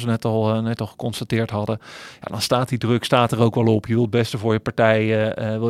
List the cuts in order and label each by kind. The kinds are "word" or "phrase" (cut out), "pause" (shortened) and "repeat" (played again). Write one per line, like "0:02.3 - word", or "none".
none